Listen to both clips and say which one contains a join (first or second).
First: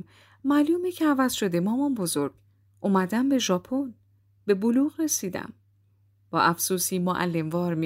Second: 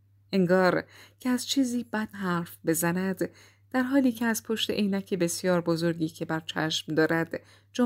second